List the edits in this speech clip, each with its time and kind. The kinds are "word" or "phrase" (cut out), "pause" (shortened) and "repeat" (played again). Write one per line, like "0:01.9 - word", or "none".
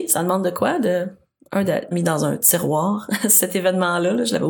0:01.9 - phrase